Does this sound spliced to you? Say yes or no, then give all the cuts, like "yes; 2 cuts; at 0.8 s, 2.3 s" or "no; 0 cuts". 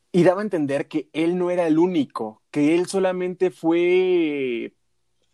no; 0 cuts